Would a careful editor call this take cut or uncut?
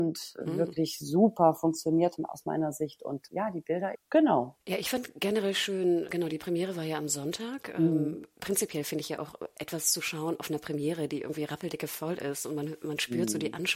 cut